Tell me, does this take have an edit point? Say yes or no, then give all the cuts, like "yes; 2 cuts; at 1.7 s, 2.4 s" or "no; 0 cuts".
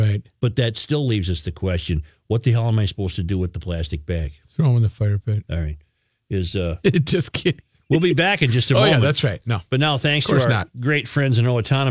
no; 0 cuts